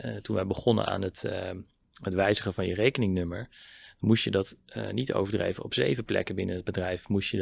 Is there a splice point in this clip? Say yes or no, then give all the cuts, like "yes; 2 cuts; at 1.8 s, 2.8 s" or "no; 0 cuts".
no; 0 cuts